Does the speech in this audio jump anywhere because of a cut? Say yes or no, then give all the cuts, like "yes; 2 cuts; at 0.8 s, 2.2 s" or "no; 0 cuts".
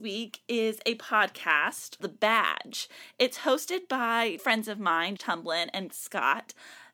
yes; 4 cuts; at 2.0 s, 4.4 s, 5.2 s, 5.9 s